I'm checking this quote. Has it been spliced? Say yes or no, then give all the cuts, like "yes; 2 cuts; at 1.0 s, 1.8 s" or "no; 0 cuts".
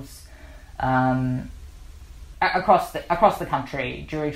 yes; 1 cut; at 2.3 s